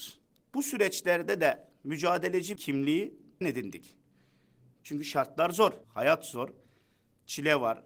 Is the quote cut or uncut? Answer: cut